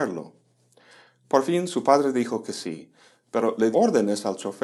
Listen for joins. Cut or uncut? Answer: cut